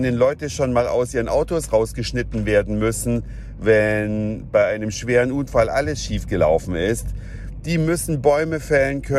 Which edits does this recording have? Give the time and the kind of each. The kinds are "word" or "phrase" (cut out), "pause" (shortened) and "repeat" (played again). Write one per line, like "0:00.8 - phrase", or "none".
none